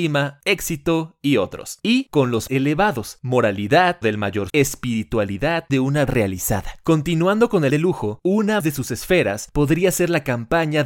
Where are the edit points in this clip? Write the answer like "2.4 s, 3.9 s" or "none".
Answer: 2.1 s, 2.5 s, 4.0 s, 4.5 s, 5.7 s, 6.1 s, 7.7 s, 8.6 s